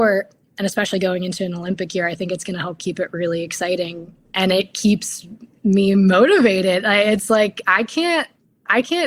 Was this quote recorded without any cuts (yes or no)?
yes